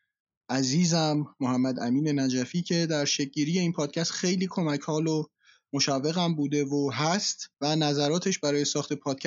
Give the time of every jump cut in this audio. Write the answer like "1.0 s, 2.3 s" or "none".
7.5 s